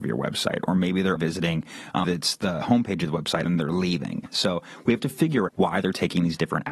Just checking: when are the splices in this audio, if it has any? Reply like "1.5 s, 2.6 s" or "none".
1.2 s, 2.0 s, 2.6 s, 3.5 s, 5.5 s